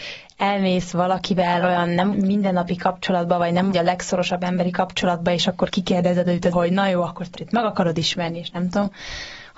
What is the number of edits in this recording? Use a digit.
5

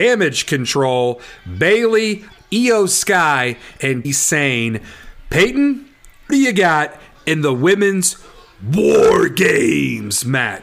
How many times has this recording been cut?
3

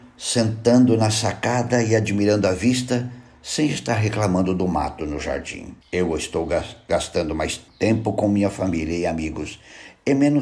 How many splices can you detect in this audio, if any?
2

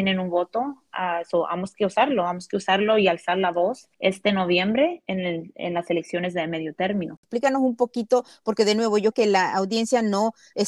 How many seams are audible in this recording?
2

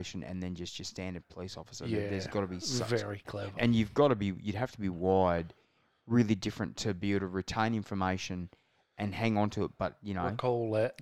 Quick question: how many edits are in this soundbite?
1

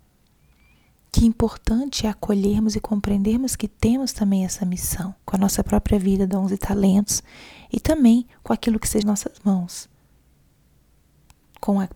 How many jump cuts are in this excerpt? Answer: 3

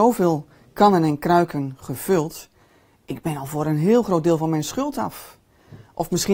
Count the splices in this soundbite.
0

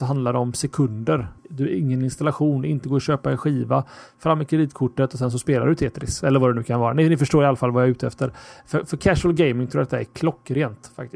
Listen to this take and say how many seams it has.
1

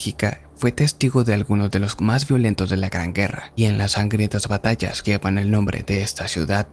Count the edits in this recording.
3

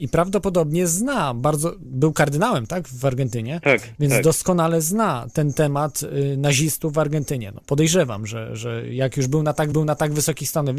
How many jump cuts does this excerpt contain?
1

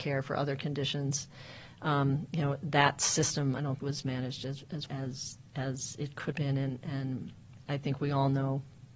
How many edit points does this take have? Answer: 3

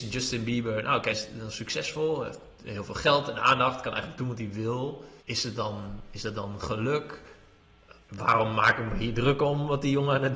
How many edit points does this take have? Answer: 3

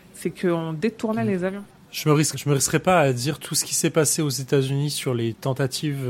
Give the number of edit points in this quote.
2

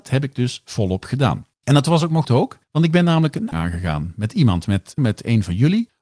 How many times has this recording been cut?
5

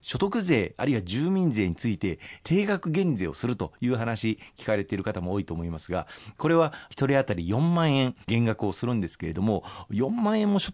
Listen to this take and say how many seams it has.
1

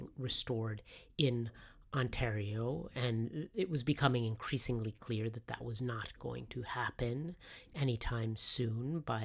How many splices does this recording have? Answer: 0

